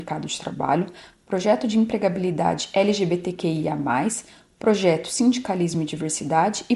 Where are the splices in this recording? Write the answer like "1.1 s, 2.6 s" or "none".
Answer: none